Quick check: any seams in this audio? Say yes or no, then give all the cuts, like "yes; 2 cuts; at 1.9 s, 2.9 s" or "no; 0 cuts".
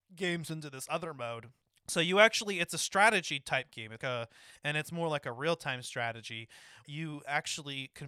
yes; 3 cuts; at 1.6 s, 4.0 s, 6.8 s